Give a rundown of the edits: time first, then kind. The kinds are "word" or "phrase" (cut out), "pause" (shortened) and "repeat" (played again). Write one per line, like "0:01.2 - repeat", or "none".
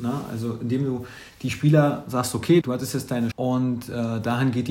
0:02.6 - word
0:03.3 - word

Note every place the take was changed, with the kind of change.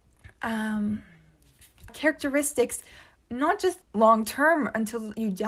0:01.9 - word
0:03.2 - pause
0:03.8 - phrase

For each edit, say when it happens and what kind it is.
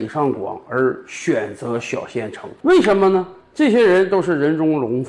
0:02.6 - pause

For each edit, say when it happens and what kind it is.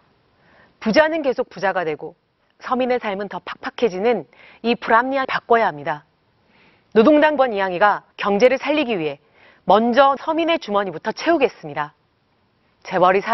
0:05.2 - word
0:07.4 - word
0:08.1 - pause
0:10.2 - word

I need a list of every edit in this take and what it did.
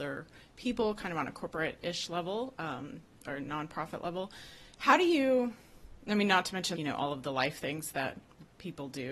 0:06.8 - word

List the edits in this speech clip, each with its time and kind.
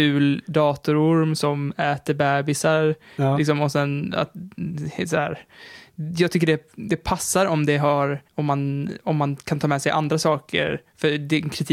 0:08.3 - pause

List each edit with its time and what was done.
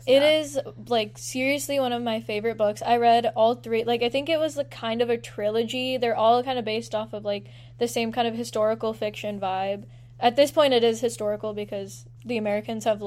none

